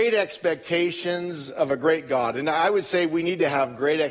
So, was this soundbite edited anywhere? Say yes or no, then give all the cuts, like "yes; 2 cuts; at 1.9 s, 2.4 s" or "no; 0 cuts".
no; 0 cuts